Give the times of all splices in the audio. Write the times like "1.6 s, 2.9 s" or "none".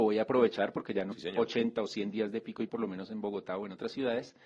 1.1 s, 2.7 s